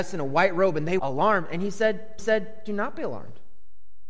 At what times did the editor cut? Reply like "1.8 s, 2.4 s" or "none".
1.0 s, 2.2 s